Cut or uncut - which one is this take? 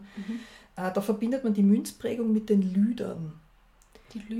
uncut